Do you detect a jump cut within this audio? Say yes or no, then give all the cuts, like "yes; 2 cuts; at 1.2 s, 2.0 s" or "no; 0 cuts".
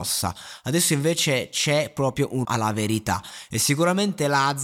yes; 1 cut; at 2.4 s